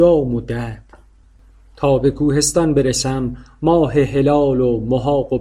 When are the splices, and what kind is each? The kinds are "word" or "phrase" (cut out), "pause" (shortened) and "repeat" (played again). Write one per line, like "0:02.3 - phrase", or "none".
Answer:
none